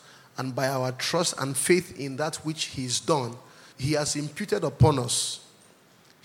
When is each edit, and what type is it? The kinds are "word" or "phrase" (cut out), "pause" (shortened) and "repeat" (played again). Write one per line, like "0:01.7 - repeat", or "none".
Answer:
0:03.7 - pause